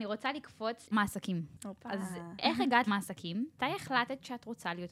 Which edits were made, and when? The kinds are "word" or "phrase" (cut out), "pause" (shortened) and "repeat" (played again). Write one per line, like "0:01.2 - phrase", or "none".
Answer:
0:00.9 - word
0:02.4 - word
0:02.9 - word
0:03.6 - word